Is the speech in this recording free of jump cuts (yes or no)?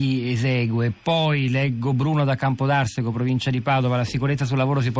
yes